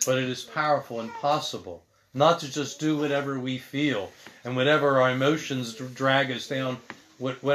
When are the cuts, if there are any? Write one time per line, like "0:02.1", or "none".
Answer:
none